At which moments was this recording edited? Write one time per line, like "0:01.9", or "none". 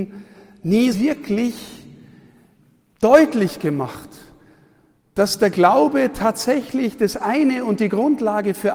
0:00.9